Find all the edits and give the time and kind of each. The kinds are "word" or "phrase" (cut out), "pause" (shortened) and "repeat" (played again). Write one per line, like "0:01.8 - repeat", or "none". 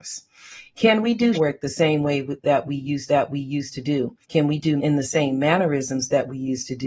0:01.3 - word
0:03.1 - repeat
0:04.2 - pause
0:04.8 - word